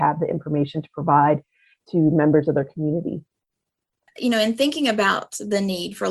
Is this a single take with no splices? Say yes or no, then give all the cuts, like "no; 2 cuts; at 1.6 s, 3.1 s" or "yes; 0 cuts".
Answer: yes; 0 cuts